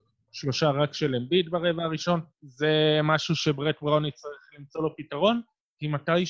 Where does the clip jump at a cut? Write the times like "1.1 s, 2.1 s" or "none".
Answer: 2.3 s